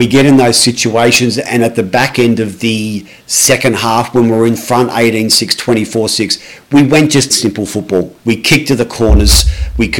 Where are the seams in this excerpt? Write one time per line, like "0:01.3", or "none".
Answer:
0:07.3
0:08.2